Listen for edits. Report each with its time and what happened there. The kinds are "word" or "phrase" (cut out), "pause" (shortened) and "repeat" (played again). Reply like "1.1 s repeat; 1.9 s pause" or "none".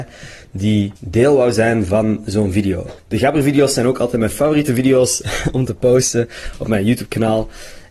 1.0 s pause; 3.0 s pause; 5.7 s phrase